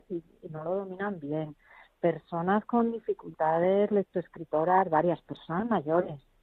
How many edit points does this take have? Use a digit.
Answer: 0